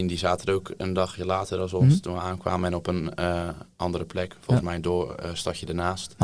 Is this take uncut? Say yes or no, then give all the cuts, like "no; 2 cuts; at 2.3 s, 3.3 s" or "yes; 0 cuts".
yes; 0 cuts